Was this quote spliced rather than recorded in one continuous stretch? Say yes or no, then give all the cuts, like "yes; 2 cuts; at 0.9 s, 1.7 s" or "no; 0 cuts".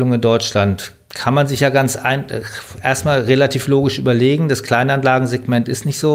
no; 0 cuts